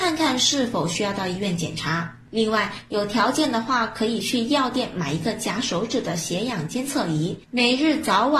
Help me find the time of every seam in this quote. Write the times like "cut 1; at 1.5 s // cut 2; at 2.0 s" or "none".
cut 1; at 2.2 s